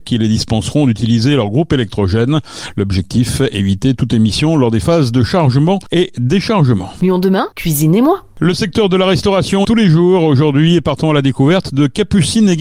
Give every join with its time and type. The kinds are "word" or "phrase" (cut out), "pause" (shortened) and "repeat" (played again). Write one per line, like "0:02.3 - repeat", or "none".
0:07.5 - pause
0:09.6 - word